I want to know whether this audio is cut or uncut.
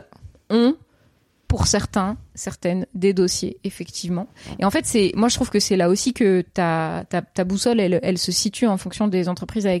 uncut